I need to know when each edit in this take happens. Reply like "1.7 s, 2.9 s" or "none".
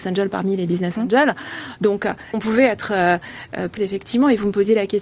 2.3 s, 3.8 s